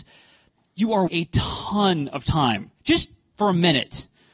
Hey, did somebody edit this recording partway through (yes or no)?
yes